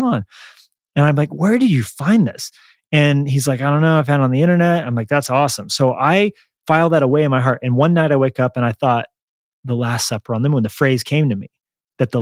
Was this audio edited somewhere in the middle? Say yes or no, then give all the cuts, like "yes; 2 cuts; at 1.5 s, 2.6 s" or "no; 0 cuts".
no; 0 cuts